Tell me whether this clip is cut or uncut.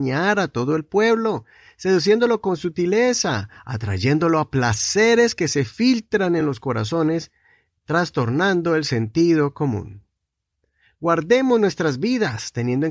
uncut